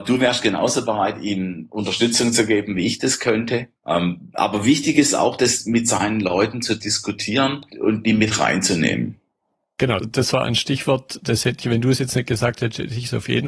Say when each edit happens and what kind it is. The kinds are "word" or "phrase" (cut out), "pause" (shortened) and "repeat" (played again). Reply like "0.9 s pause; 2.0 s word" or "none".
3.8 s pause; 7.7 s pause; 10.0 s word; 11.6 s word

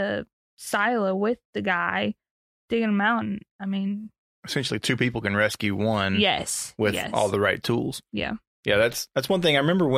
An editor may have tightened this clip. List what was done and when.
none

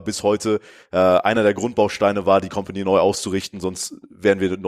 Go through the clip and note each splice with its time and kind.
none

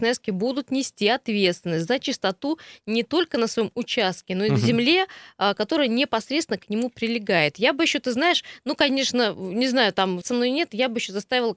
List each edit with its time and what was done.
10.2 s word

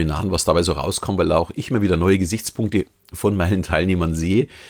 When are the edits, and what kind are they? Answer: none

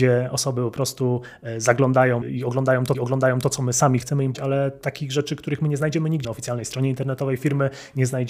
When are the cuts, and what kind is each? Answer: 2.2 s word; 2.9 s repeat; 4.0 s word; 4.3 s word; 6.2 s phrase

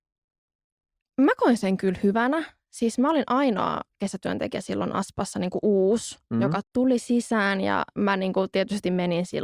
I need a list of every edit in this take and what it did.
6.6 s word

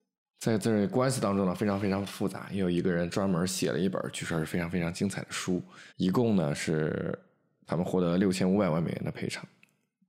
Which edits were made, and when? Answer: 5.9 s pause

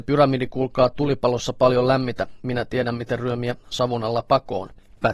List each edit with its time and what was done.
none

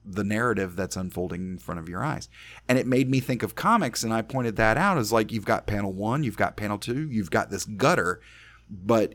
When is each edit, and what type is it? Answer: none

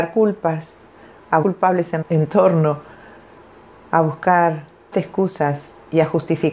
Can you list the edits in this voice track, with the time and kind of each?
1.4 s word; 2.0 s word; 4.9 s word

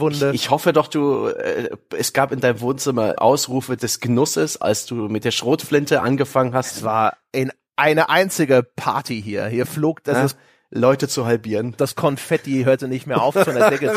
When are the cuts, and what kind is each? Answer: 3.2 s word; 3.8 s word

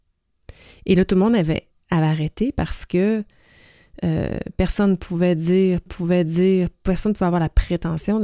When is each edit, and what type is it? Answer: 5.9 s repeat

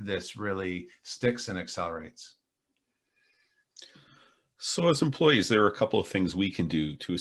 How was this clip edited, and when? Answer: none

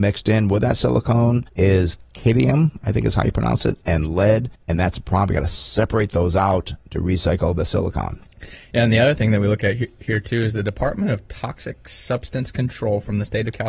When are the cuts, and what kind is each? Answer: 1.5 s pause; 4.6 s pause

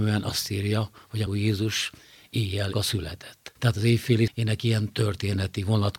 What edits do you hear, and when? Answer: 1.3 s word; 2.7 s word; 3.6 s pause; 4.3 s word

